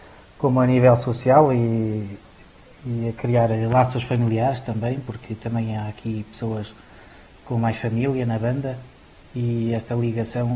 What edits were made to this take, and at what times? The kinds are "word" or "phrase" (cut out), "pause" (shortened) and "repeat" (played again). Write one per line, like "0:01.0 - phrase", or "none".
none